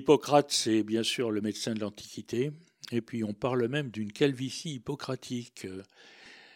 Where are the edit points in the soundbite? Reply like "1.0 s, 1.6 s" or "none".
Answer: none